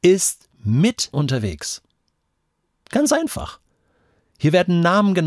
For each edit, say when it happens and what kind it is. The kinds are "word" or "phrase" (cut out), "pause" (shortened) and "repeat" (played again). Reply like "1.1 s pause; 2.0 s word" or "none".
1.1 s word